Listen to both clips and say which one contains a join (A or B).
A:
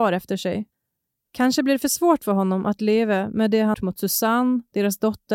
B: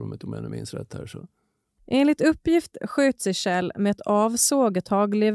A